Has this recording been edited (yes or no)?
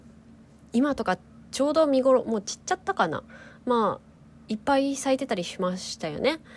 no